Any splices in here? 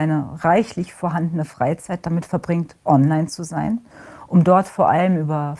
no; 0 cuts

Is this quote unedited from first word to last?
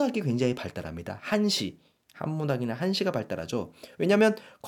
yes; 0 cuts

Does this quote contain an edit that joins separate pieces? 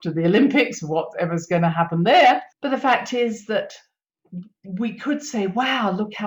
yes; 1 cut; at 2.5 s

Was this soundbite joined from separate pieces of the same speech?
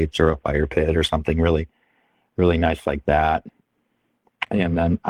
no; 0 cuts

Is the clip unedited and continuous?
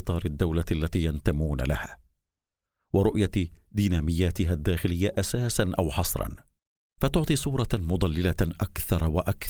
yes; 0 cuts

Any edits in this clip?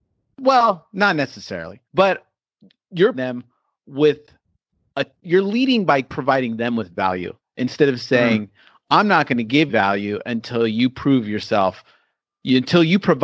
yes; 4 cuts; at 1.8 s, 3.1 s, 5.1 s, 9.7 s

